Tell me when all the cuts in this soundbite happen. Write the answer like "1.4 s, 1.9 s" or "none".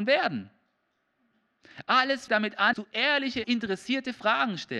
2.3 s, 2.7 s, 3.4 s